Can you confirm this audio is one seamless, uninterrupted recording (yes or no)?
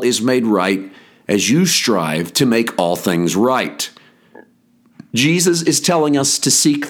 yes